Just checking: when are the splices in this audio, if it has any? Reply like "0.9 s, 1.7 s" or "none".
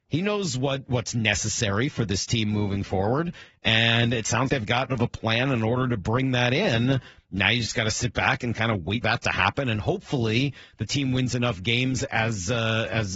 4.5 s, 4.9 s, 9.0 s